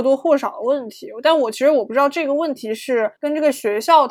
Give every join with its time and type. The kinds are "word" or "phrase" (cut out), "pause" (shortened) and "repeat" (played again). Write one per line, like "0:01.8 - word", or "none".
0:03.2 - pause